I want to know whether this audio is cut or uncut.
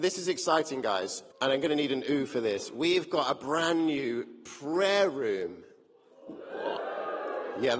cut